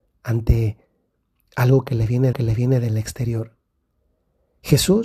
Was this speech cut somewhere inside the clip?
yes; 1 cut; at 2.3 s

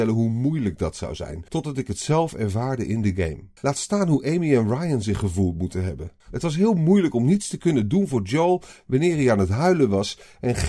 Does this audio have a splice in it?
yes; 3 cuts; at 1.5 s, 3.6 s, 6.2 s

